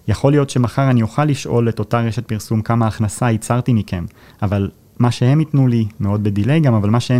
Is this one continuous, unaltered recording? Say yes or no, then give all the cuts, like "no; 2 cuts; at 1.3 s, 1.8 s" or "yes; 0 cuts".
yes; 0 cuts